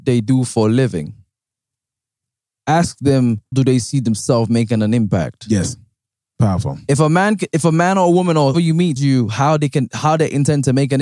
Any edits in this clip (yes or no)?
yes